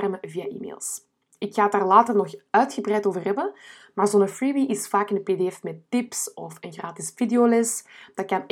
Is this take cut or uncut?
uncut